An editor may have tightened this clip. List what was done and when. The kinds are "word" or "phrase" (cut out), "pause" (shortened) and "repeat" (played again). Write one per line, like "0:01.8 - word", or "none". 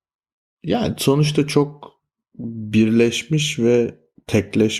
0:02.1 - pause

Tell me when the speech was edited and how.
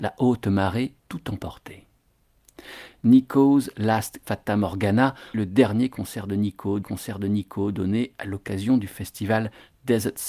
0:01.0 - word
0:04.2 - word
0:05.3 - word
0:06.8 - repeat

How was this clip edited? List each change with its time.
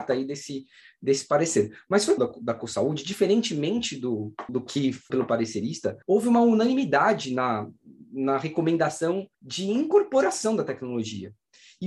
0:02.2 - phrase
0:04.5 - word
0:05.1 - phrase
0:06.0 - pause
0:09.3 - pause

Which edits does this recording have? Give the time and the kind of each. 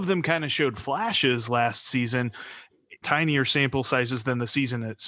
0:03.0 - word

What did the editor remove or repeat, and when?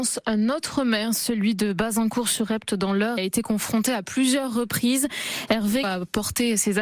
0:03.2 - word
0:05.8 - word

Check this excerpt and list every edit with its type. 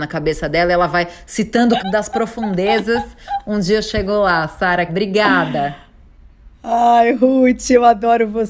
0:01.8 - word
0:04.9 - word

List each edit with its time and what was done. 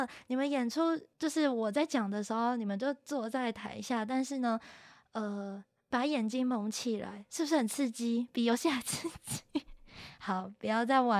0:01.1 - pause

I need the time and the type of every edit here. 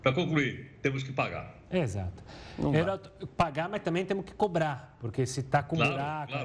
none

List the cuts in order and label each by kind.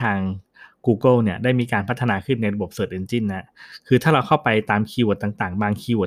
none

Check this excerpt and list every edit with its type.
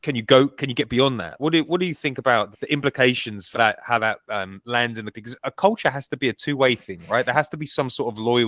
0:01.4 - word
0:02.5 - word
0:03.5 - word
0:05.1 - word

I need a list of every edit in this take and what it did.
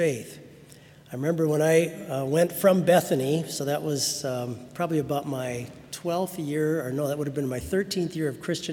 none

